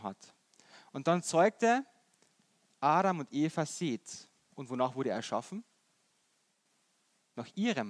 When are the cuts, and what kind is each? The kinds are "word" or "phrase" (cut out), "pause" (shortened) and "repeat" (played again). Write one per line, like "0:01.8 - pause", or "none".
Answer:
none